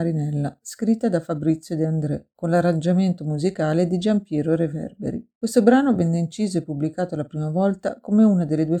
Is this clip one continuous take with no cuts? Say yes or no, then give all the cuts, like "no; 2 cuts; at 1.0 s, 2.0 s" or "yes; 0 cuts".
yes; 0 cuts